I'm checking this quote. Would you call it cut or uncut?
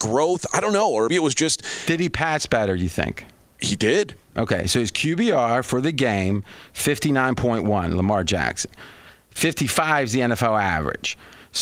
cut